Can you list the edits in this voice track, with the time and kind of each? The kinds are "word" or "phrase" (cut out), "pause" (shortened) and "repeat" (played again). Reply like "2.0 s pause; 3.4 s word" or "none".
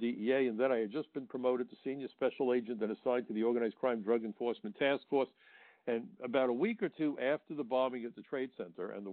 none